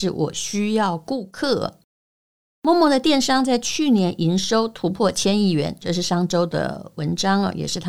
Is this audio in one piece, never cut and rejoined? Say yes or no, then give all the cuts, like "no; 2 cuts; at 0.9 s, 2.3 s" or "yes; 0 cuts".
yes; 0 cuts